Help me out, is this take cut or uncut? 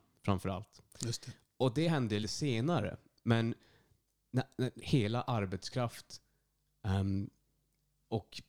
cut